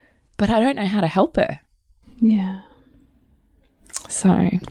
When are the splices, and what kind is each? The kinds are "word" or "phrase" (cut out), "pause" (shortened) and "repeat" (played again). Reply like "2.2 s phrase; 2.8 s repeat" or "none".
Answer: none